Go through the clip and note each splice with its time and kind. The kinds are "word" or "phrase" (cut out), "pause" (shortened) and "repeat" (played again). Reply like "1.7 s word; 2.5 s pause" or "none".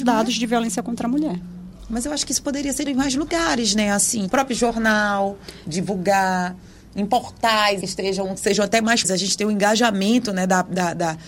2.9 s word; 4.3 s word; 7.8 s word; 9.0 s word